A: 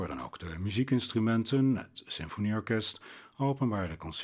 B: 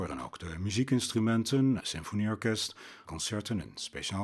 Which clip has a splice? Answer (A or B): B